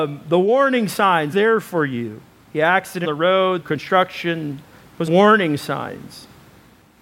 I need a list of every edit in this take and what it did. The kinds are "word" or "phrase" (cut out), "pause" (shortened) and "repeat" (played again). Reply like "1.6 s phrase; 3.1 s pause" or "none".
1.3 s word; 3.0 s word; 3.6 s word; 5.1 s word